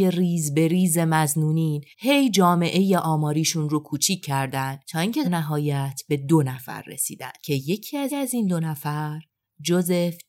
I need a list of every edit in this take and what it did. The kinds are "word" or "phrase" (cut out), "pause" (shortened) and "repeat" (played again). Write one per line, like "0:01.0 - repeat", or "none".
0:01.9 - pause
0:04.8 - pause
0:05.2 - word
0:07.4 - pause
0:08.1 - repeat